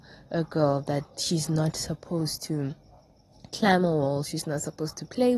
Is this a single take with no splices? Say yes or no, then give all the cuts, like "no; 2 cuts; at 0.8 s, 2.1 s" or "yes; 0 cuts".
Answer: yes; 0 cuts